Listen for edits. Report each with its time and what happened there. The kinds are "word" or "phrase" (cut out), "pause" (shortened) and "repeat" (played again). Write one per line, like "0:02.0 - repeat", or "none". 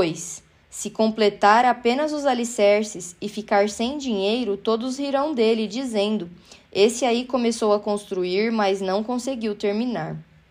none

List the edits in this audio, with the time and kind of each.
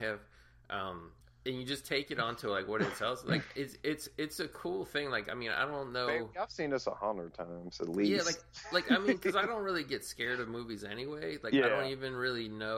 0:01.2 - pause

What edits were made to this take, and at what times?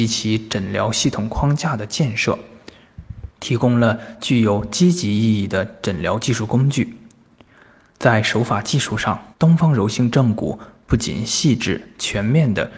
0:03.3 - pause
0:09.3 - pause

